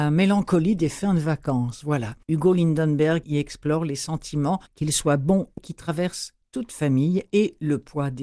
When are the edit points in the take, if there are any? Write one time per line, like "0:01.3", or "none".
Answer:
0:02.2
0:03.2
0:04.7
0:05.6

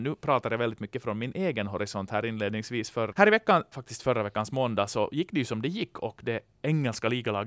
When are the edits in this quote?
0:03.1
0:03.7

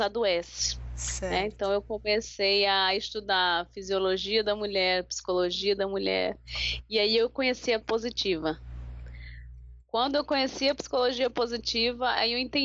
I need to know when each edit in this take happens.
0:07.8

